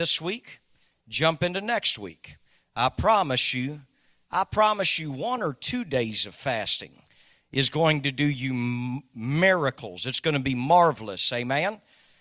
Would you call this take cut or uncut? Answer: uncut